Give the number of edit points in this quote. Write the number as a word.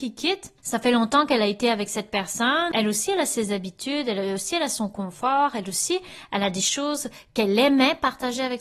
zero